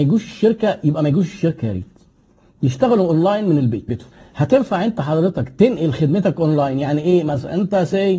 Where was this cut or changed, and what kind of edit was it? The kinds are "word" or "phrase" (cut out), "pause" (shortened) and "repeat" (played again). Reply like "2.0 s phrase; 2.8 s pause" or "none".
3.9 s phrase